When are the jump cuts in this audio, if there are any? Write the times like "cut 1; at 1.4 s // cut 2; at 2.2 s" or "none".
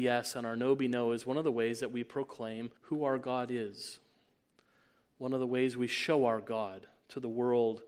cut 1; at 2.8 s